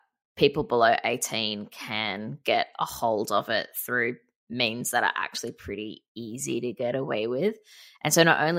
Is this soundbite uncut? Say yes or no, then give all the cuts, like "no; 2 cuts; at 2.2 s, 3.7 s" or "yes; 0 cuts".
yes; 0 cuts